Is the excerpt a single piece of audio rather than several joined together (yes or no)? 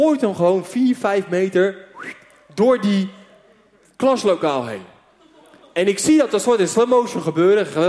yes